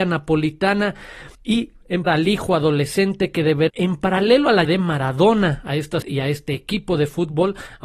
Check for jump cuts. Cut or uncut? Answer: cut